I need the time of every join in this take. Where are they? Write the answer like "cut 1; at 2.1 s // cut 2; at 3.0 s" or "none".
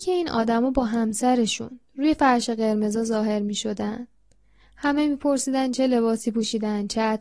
none